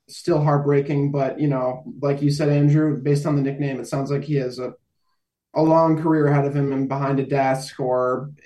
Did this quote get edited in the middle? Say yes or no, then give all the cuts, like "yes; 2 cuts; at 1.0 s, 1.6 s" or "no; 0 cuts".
no; 0 cuts